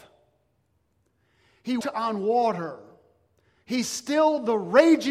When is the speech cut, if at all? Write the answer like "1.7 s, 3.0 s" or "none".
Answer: 1.8 s